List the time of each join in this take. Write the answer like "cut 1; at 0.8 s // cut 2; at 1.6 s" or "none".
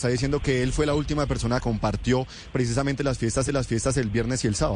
cut 1; at 1.6 s // cut 2; at 2.5 s // cut 3; at 3.5 s